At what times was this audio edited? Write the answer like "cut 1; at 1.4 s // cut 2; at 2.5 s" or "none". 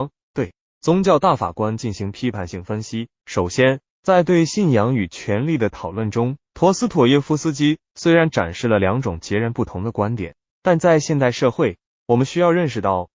cut 1; at 3.1 s // cut 2; at 6.4 s

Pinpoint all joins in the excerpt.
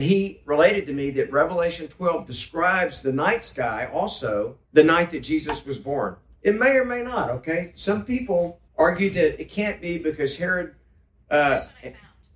cut 1; at 4.6 s // cut 2; at 6.4 s // cut 3; at 8.7 s

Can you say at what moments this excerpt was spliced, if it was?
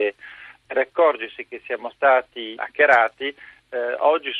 none

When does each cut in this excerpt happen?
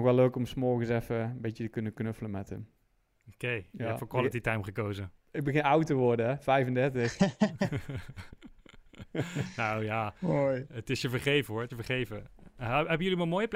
cut 1; at 11.7 s

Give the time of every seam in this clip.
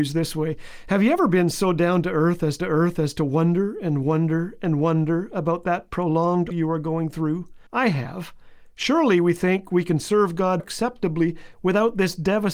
cut 1; at 2.6 s // cut 2; at 6.5 s // cut 3; at 7.7 s // cut 4; at 10.6 s

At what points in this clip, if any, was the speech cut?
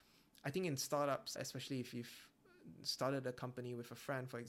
cut 1; at 1.4 s

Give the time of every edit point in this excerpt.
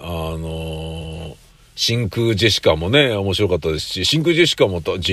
none

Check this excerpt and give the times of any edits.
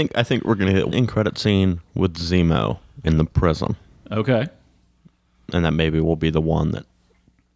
cut 1; at 0.9 s

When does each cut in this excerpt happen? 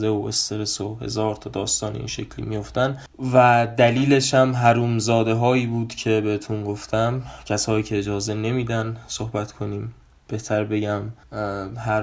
none

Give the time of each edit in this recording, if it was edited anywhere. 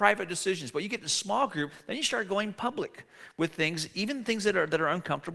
none

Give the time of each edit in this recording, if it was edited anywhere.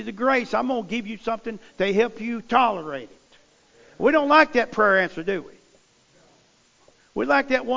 none

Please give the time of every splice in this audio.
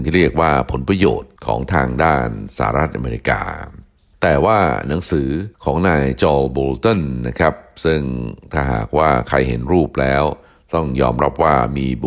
cut 1; at 1.4 s // cut 2; at 5.5 s

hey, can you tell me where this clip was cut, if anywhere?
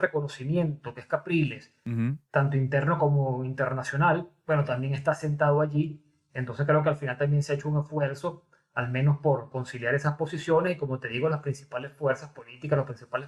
none

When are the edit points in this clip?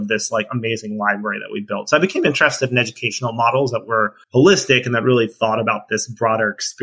cut 1; at 4.2 s

